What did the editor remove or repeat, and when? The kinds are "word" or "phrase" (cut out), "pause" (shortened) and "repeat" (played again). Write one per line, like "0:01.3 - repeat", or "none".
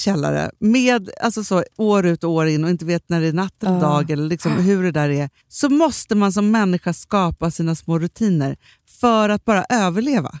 0:05.4 - pause